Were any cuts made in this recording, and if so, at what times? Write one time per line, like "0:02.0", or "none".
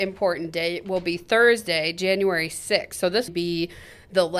0:03.3